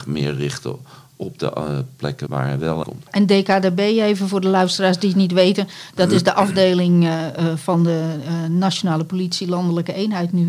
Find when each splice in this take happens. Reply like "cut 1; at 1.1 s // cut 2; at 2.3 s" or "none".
cut 1; at 2.3 s // cut 2; at 2.8 s